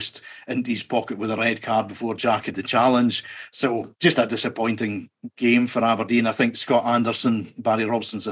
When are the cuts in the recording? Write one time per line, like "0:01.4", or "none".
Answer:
0:02.5
0:04.0